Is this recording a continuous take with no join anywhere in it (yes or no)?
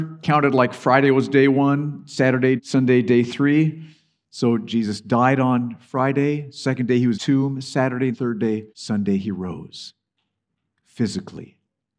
no